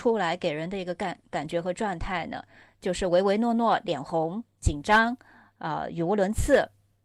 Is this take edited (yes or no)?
no